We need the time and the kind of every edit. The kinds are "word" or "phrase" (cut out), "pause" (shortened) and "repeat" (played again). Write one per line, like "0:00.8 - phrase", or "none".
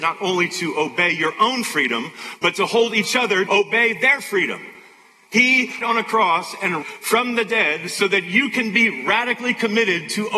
0:03.5 - word
0:05.8 - phrase
0:06.8 - word